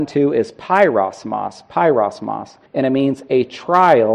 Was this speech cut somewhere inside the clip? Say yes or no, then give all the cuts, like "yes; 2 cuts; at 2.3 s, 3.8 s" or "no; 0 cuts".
yes; 1 cut; at 2.7 s